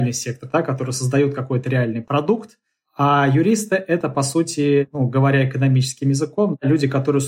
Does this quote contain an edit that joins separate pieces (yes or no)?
no